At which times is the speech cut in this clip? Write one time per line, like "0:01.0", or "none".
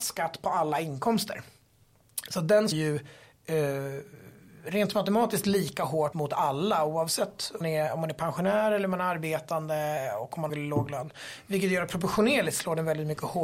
0:02.7
0:06.1
0:07.6
0:10.5